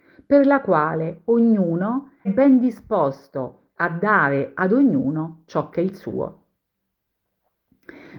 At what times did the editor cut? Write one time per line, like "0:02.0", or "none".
0:02.2